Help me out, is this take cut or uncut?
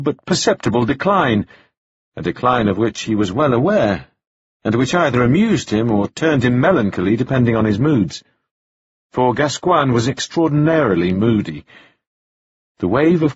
uncut